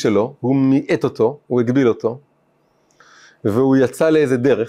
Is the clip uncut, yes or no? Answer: yes